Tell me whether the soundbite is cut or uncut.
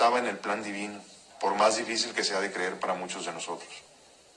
uncut